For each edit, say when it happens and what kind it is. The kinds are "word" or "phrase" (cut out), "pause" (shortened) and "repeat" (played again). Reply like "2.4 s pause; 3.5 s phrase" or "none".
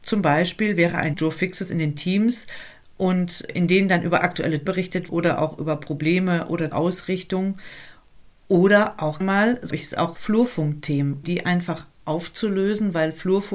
1.1 s word; 3.5 s word; 4.7 s word; 5.1 s word; 6.7 s word; 9.2 s word; 9.7 s word; 10.2 s word; 11.2 s word